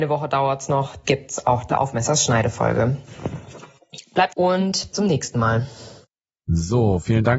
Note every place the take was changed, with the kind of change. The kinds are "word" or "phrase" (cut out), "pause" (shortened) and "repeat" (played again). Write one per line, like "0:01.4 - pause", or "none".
0:01.0 - word
0:01.7 - word
0:04.3 - word
0:04.9 - word